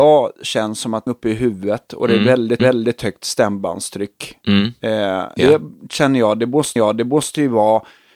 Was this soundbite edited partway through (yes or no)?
yes